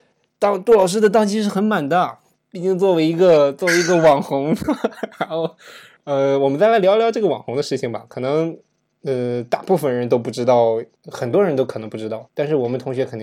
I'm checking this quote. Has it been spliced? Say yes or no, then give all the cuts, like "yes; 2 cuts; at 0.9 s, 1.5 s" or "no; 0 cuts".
no; 0 cuts